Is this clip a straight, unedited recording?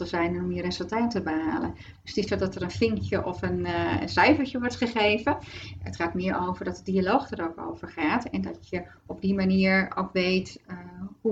no; 1 cut; at 2.3 s

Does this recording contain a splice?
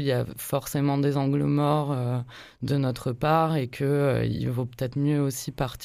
no; 0 cuts

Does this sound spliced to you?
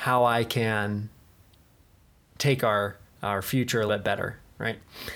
yes; 3 cuts; at 2.6 s, 3.0 s, 3.9 s

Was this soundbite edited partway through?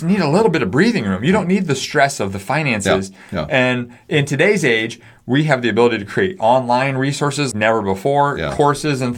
yes; 1 cut; at 7.5 s

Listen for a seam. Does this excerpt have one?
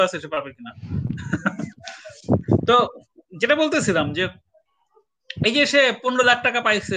no; 0 cuts

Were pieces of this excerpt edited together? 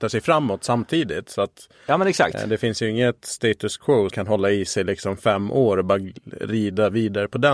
yes; 1 cut; at 4.1 s

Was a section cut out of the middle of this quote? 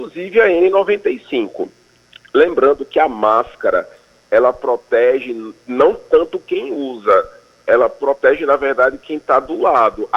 no; 0 cuts

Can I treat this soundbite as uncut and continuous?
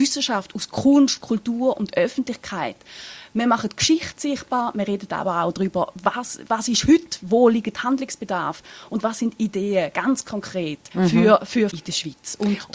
no; 2 cuts; at 10.9 s, 11.7 s

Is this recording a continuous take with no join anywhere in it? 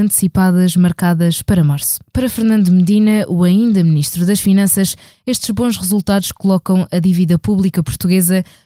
yes; 0 cuts

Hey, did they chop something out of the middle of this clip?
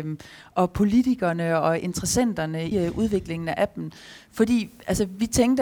yes; 1 cut; at 2.7 s

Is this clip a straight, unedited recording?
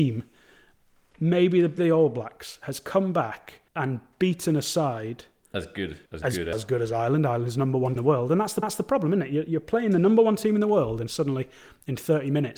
no; 6 cuts; at 1.8 s, 3.7 s, 6.1 s, 6.5 s, 8.0 s, 8.6 s

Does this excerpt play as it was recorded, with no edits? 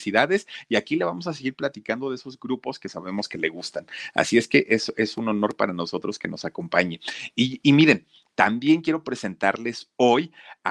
yes; 0 cuts

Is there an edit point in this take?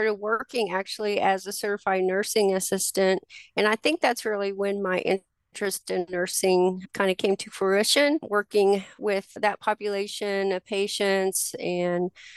no; 0 cuts

